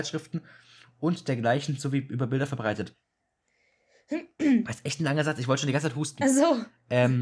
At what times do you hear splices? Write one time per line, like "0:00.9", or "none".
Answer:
0:03.2